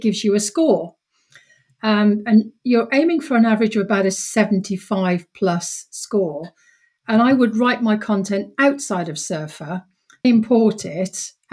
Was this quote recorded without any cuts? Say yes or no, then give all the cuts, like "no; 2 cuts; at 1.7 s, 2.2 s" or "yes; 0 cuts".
no; 1 cut; at 10.2 s